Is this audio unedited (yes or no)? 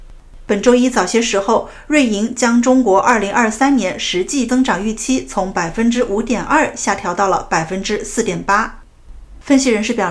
no